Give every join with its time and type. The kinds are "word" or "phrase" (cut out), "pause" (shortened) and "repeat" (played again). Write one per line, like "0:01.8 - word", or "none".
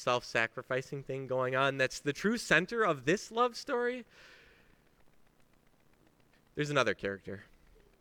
none

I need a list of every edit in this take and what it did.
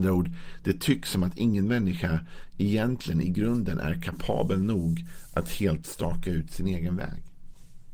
none

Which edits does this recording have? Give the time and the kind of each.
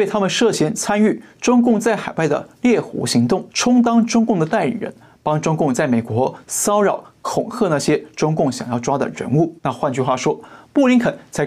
0:03.5 - pause
0:09.6 - pause

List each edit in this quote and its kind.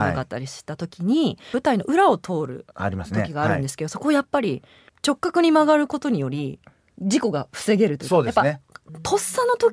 0:02.7 - pause

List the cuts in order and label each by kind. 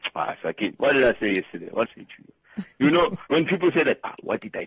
0:01.9 - phrase
0:03.3 - pause

